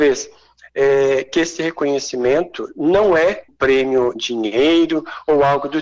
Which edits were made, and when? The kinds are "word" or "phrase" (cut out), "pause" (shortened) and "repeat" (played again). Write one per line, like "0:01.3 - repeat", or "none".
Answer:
0:03.5 - word
0:04.1 - word